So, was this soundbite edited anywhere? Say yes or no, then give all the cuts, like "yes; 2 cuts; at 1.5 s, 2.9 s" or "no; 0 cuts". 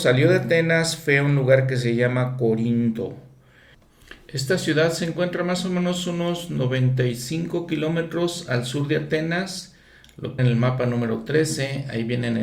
yes; 1 cut; at 10.4 s